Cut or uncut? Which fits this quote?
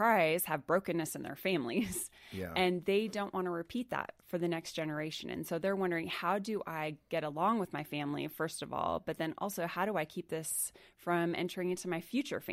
uncut